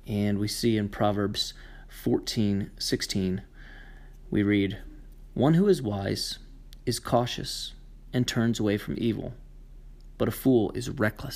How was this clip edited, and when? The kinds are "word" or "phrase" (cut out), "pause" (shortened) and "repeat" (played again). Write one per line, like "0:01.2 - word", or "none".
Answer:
none